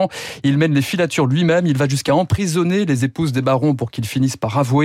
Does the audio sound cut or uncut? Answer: uncut